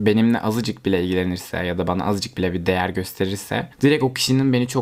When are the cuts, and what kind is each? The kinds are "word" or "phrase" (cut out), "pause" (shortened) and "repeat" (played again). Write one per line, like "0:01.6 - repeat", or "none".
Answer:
none